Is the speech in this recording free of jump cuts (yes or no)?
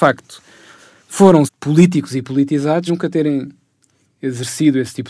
no